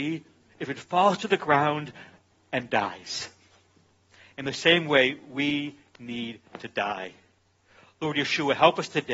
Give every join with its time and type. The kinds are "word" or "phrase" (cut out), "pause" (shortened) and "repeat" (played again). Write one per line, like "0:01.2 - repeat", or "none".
none